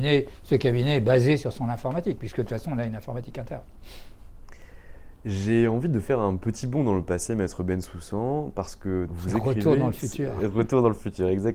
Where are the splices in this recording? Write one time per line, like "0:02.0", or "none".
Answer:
0:09.1